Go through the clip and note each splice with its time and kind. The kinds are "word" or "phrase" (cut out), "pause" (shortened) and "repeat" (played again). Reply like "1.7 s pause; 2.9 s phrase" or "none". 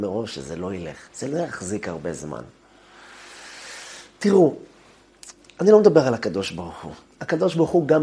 1.1 s pause; 5.4 s pause

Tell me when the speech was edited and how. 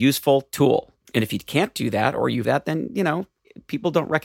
1.0 s pause; 2.4 s phrase

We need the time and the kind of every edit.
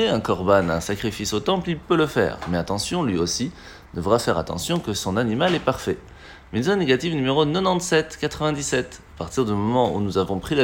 none

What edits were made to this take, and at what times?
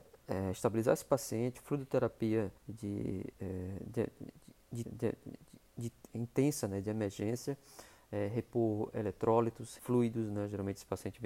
2.6 s pause; 4.8 s repeat; 9.8 s word

